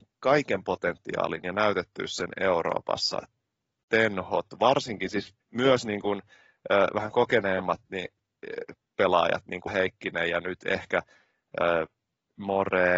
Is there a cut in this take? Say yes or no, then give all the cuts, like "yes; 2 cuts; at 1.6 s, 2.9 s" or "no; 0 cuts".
yes; 2 cuts; at 5.4 s, 9.7 s